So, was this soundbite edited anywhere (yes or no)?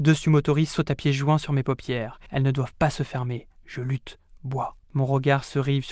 yes